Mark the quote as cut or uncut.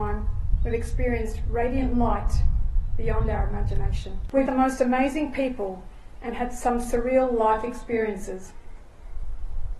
cut